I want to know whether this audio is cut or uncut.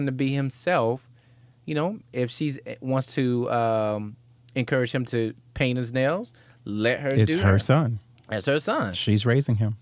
uncut